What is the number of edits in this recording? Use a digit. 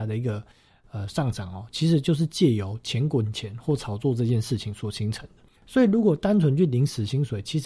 1